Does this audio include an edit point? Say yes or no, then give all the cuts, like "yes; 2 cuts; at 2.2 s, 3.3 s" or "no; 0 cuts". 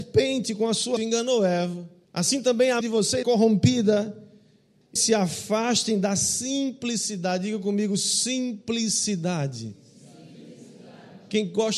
yes; 5 cuts; at 1.0 s, 2.0 s, 2.8 s, 3.2 s, 5.0 s